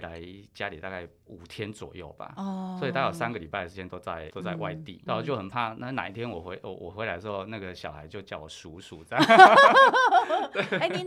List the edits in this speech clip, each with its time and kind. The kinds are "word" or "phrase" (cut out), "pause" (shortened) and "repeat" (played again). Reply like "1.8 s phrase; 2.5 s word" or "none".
4.3 s word; 5.1 s word

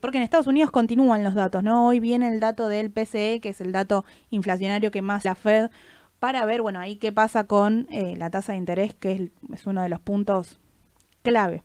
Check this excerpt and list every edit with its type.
5.2 s word

